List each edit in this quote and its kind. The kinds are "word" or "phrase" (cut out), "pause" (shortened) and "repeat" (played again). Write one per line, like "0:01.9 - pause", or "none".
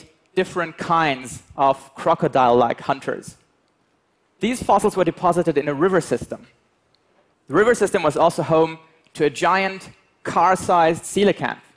none